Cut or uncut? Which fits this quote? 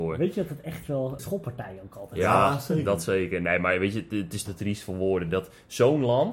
cut